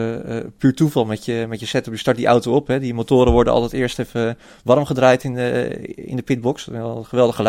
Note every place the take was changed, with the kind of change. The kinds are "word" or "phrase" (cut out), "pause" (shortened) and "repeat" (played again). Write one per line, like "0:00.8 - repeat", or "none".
none